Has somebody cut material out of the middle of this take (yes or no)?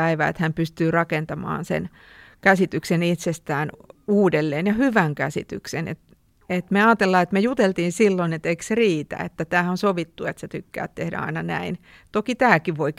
no